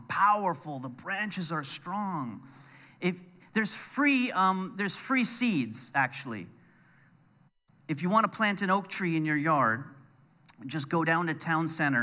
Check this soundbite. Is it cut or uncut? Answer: uncut